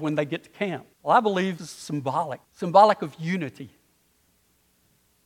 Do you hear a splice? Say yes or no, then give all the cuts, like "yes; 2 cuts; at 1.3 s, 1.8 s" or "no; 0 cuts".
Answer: yes; 3 cuts; at 0.9 s, 1.6 s, 2.4 s